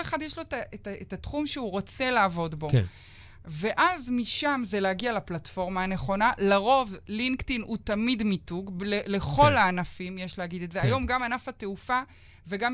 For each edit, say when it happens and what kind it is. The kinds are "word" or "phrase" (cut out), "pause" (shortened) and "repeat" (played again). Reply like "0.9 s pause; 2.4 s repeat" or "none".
none

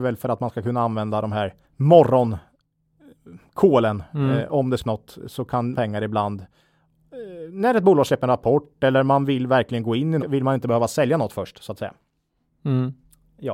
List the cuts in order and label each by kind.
1.6 s pause; 4.8 s phrase; 5.7 s phrase; 10.2 s word

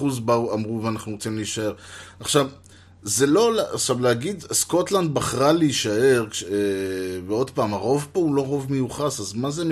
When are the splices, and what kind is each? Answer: none

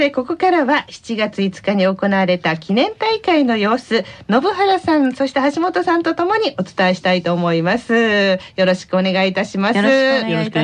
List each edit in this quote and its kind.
none

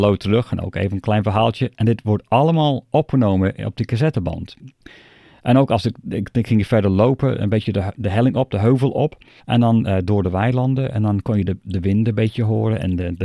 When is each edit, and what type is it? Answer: 9.4 s pause

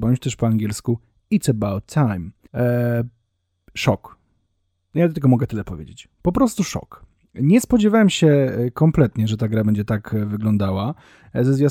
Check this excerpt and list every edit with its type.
2.4 s pause

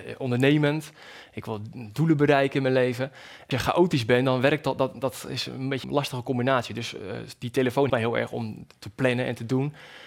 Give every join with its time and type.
3.5 s word; 5.8 s word; 7.9 s word

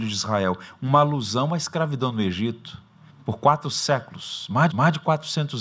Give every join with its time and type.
3.1 s pause; 4.7 s repeat

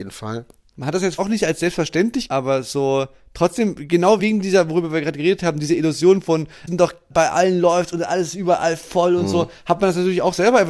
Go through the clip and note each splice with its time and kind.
1.2 s word; 2.3 s word; 4.2 s word; 6.7 s word

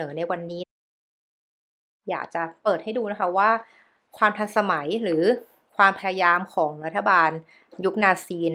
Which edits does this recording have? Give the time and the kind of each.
none

